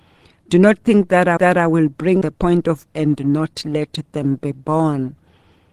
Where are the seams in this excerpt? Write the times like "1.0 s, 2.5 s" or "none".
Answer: 1.4 s, 2.2 s, 2.9 s